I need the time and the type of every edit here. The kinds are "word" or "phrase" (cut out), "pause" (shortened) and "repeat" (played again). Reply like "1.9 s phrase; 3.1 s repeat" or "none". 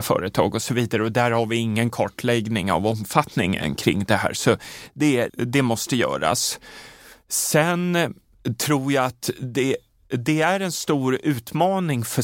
5.3 s word